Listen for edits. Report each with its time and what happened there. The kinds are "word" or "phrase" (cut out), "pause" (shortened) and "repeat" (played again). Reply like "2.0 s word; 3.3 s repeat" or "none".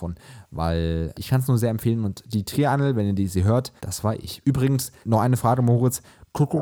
1.1 s word; 3.8 s pause; 5.0 s word